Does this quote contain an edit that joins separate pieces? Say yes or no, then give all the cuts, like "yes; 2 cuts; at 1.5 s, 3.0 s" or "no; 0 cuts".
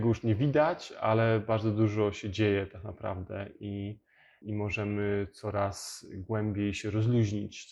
no; 0 cuts